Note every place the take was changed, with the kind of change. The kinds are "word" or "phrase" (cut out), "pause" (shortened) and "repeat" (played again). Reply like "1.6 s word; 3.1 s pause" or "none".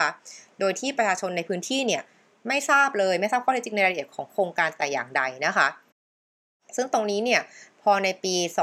none